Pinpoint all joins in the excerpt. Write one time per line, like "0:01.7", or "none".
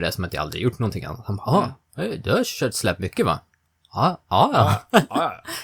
none